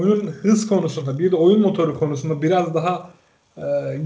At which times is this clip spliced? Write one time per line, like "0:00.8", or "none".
none